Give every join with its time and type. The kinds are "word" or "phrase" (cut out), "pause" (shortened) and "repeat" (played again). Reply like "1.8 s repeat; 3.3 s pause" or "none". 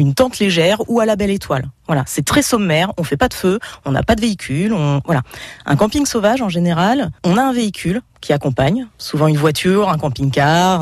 8.1 s pause